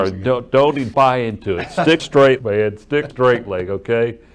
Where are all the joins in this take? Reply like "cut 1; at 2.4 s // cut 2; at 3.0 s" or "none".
cut 1; at 0.9 s // cut 2; at 2.0 s // cut 3; at 2.4 s // cut 4; at 3.1 s